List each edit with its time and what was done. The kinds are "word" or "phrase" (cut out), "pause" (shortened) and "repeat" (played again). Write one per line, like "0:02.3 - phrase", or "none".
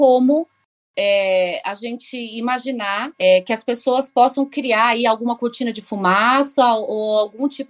0:03.1 - pause